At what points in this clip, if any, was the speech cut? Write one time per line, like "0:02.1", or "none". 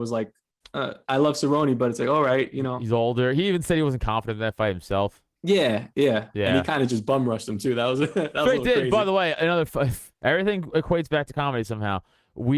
0:05.4
0:09.3
0:10.1